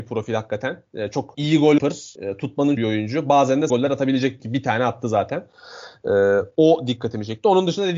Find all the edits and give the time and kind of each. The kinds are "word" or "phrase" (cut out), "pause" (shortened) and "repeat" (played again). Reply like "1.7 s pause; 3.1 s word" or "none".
1.8 s phrase; 2.8 s phrase; 3.7 s word; 4.4 s phrase

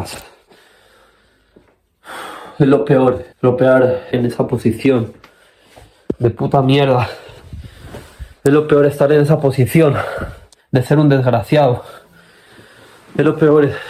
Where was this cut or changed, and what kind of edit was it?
3.3 s pause; 4.1 s phrase; 10.6 s pause

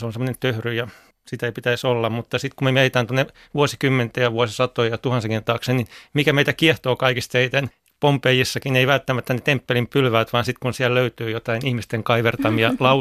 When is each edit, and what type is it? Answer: none

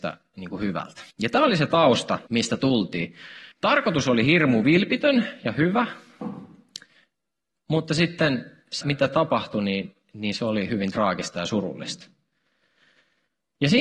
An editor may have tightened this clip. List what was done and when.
1.1 s pause; 2.3 s pause; 3.5 s pause; 8.8 s word

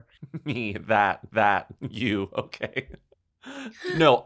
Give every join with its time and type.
1.3 s repeat

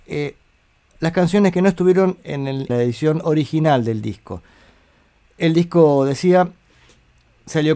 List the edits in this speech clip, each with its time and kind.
2.7 s word

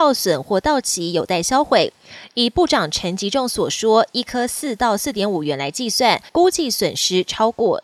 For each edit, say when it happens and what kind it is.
6.3 s pause

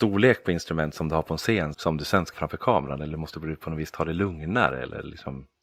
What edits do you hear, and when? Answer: 1.7 s word; 2.3 s word

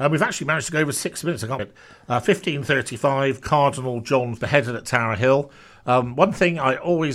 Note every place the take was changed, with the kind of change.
1.6 s word; 4.4 s phrase

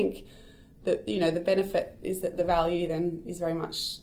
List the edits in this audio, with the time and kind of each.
none

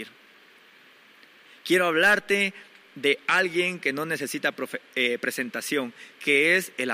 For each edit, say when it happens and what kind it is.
none

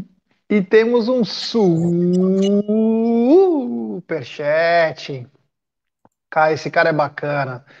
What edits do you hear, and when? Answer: none

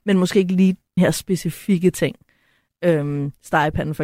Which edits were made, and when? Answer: 1.0 s word

